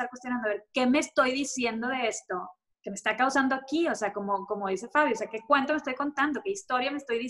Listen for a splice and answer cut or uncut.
uncut